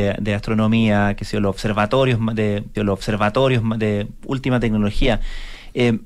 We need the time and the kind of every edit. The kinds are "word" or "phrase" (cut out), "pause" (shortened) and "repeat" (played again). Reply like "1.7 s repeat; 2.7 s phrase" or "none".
2.7 s repeat